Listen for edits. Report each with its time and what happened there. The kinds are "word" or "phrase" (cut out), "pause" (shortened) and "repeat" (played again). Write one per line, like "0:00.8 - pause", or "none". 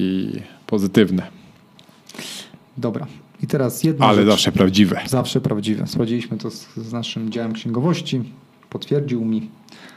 none